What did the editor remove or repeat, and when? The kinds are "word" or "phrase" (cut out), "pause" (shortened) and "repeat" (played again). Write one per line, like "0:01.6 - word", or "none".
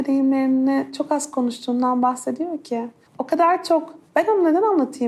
0:03.1 - pause